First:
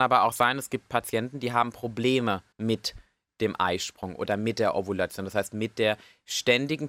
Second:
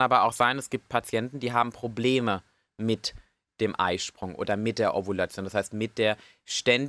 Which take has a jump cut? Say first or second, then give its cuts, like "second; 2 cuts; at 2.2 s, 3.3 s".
first; 1 cut; at 2.5 s